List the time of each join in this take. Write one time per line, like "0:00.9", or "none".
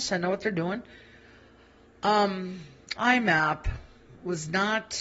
0:03.0